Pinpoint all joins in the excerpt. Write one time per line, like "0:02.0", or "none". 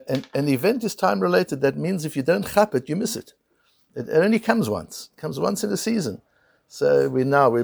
none